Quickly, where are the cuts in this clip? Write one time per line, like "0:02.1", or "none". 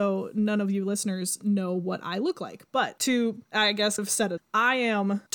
0:04.0
0:04.4